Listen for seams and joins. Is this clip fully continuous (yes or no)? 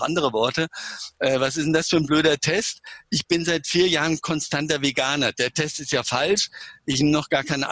yes